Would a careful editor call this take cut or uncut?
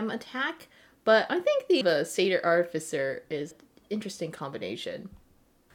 cut